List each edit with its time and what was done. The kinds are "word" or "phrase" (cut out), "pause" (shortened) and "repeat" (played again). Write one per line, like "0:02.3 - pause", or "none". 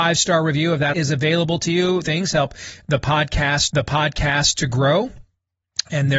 0:00.9 - word
0:02.0 - phrase
0:03.7 - repeat